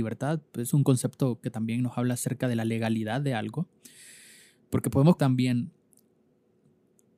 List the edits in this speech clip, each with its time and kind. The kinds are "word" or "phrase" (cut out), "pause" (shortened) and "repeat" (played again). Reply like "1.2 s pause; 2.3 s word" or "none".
5.2 s word